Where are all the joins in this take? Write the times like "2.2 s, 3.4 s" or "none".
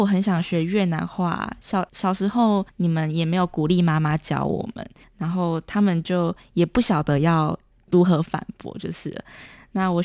1.9 s, 2.7 s, 5.0 s, 7.8 s